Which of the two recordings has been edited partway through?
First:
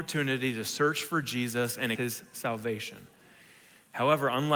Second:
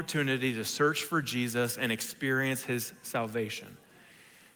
first; 1 cut; at 1.9 s

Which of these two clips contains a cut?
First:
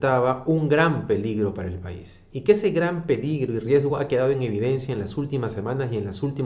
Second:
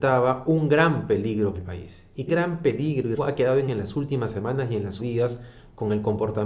second; 5 cuts; at 1.5 s, 2.3 s, 3.2 s, 3.7 s, 5.0 s

